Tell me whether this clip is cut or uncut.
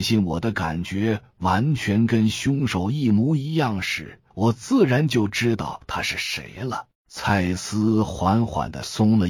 cut